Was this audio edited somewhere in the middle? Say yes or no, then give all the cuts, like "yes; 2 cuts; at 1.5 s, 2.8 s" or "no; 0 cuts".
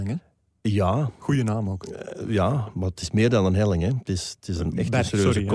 no; 0 cuts